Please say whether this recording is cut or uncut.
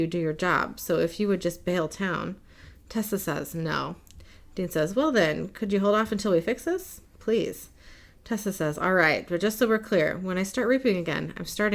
uncut